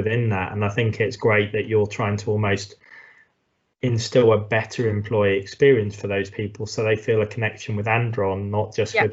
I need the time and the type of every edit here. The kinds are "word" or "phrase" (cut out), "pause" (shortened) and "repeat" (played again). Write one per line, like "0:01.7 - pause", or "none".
none